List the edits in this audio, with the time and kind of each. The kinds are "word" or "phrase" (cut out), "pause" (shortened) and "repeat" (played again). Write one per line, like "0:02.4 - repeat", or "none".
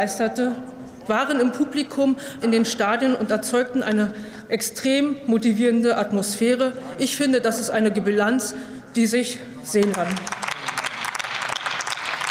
0:02.4 - word
0:07.9 - word
0:09.9 - word